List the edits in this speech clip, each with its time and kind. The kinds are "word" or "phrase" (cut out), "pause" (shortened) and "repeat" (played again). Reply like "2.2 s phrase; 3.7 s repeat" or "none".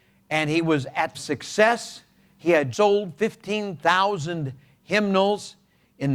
1.1 s phrase; 2.7 s word

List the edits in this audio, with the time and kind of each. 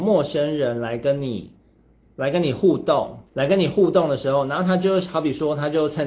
3.3 s pause

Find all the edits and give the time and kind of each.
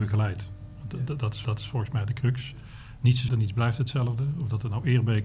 1.4 s repeat; 3.3 s word

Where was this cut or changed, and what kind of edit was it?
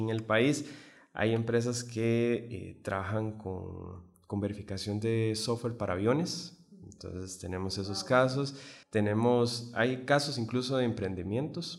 8.8 s pause

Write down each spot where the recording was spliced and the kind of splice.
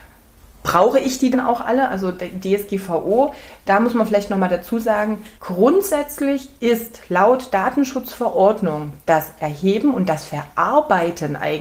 1.3 s word; 5.4 s pause

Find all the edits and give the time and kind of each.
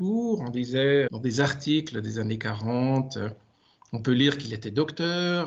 1.1 s word

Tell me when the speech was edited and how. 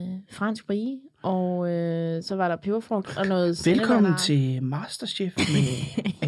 3.0 s phrase

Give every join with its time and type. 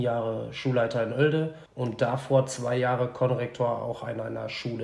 1.7 s pause

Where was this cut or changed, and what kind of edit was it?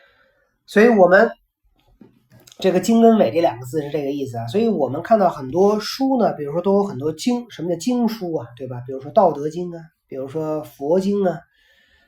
none

